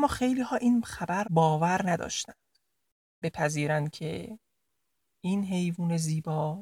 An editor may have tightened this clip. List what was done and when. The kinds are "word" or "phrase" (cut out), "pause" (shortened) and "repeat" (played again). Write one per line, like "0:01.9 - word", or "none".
0:01.2 - word
0:03.2 - word